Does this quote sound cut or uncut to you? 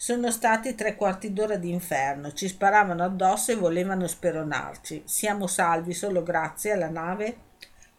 uncut